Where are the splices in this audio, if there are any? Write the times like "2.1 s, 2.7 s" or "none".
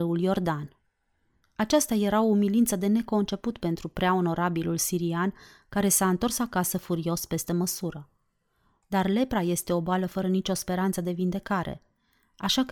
none